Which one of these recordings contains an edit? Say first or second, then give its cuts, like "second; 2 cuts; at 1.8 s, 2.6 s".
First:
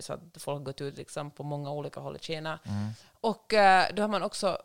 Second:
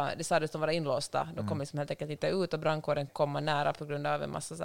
second; 1 cut; at 3.1 s